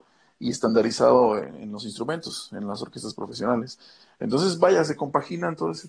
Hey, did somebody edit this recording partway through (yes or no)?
no